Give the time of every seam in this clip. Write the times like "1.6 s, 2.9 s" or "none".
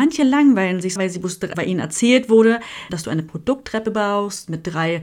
1.0 s, 1.5 s, 2.9 s